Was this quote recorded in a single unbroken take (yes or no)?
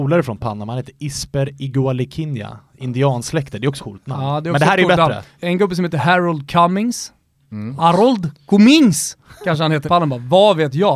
no